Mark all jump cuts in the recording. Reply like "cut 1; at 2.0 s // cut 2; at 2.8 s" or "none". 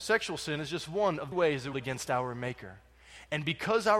cut 1; at 1.3 s // cut 2; at 1.7 s